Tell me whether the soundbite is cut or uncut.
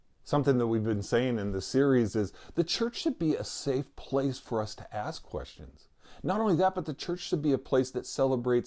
uncut